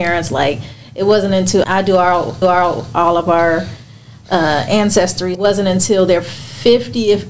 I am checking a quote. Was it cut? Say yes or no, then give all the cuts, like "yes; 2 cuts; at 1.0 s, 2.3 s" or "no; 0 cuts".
yes; 3 cuts; at 1.6 s, 2.4 s, 5.3 s